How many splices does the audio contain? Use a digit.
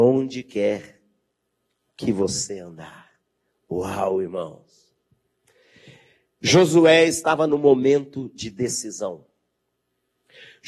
0